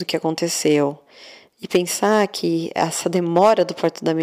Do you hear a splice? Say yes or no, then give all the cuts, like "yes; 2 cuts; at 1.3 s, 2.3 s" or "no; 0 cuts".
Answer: no; 0 cuts